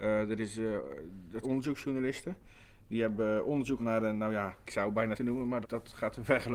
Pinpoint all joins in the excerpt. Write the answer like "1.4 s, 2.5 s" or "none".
1.4 s, 3.8 s, 4.6 s, 5.1 s, 5.6 s